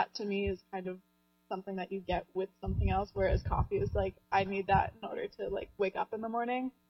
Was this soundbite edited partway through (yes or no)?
no